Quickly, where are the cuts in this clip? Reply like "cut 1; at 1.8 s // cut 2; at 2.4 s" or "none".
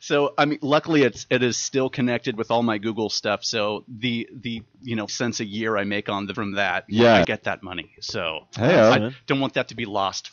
cut 1; at 5.1 s // cut 2; at 6.3 s // cut 3; at 7.2 s